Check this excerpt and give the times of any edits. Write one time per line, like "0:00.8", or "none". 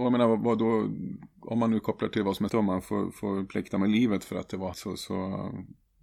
0:02.5
0:04.7